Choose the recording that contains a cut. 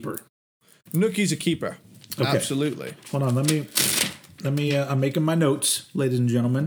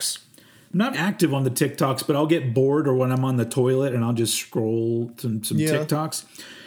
second; 1 cut; at 0.9 s

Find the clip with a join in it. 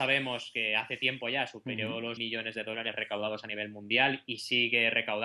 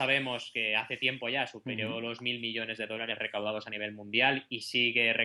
first; 1 cut; at 2.2 s

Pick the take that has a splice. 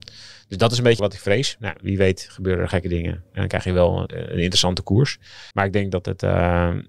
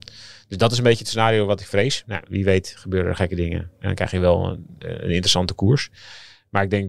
first; 3 cuts; at 1.0 s, 4.1 s, 5.5 s

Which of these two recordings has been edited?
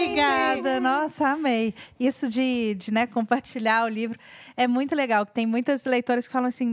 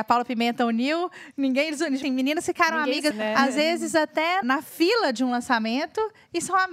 second; 3 cuts; at 2.0 s, 3.1 s, 4.4 s

